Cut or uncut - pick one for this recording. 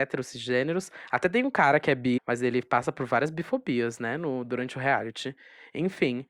cut